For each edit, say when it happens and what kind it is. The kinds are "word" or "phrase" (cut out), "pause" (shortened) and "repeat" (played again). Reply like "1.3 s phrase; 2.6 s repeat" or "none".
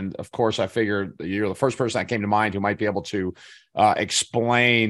none